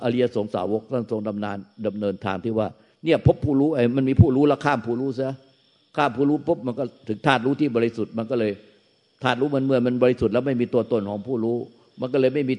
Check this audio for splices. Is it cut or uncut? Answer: uncut